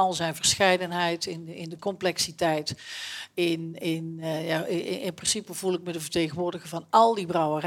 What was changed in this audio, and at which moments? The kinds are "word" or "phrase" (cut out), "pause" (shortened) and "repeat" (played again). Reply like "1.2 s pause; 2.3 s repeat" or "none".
none